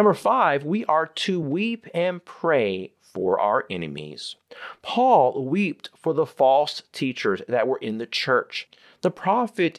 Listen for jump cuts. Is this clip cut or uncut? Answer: uncut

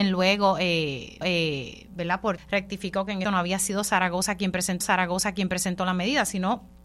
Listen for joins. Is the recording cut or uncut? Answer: cut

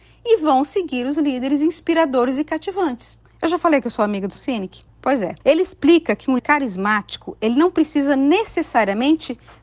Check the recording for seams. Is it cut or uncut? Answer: cut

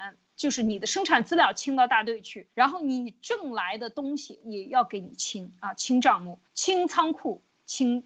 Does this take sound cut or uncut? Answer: cut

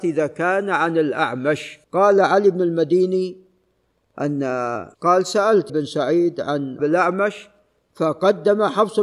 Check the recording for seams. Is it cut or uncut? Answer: cut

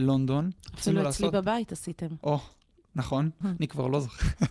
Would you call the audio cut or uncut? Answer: cut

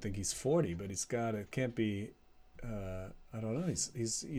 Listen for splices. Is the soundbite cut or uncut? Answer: uncut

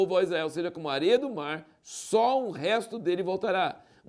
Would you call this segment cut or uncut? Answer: uncut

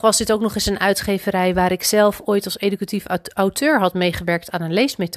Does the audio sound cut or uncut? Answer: uncut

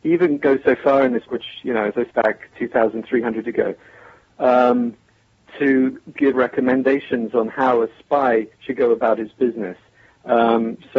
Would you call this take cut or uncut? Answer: cut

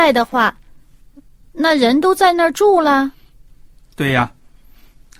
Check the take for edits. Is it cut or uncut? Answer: uncut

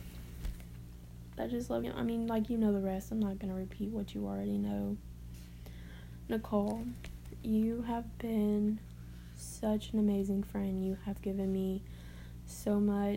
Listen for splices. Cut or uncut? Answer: cut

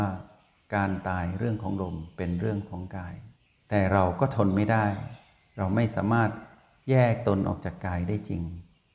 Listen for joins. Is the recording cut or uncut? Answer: cut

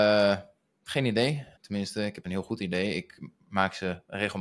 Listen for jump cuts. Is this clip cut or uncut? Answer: cut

